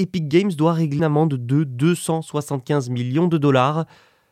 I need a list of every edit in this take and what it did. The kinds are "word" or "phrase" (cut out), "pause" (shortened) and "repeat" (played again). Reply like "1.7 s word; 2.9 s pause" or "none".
1.0 s word